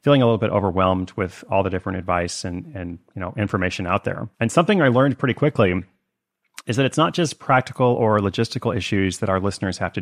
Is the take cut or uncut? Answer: cut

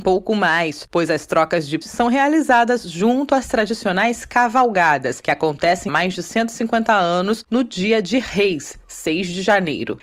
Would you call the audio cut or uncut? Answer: cut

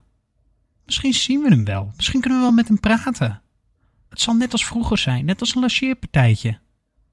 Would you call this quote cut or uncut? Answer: uncut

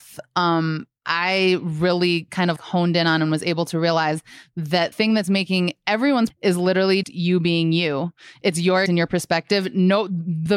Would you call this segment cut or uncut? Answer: cut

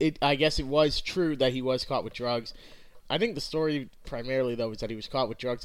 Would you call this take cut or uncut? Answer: cut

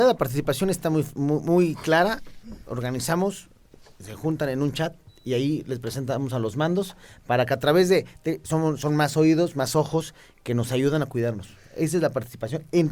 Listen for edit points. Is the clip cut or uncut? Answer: uncut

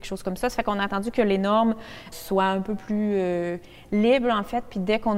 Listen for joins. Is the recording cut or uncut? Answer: cut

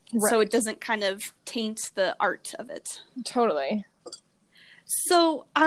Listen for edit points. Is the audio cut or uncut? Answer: cut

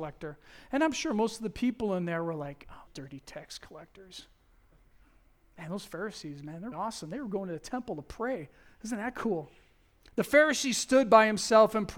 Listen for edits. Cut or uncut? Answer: cut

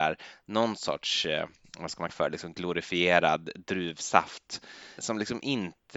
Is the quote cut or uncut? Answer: cut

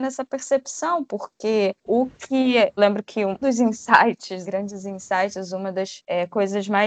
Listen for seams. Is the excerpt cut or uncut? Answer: cut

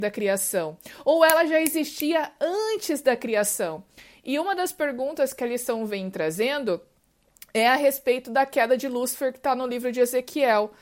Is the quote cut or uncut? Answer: uncut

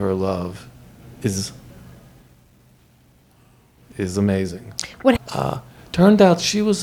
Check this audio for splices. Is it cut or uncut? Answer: cut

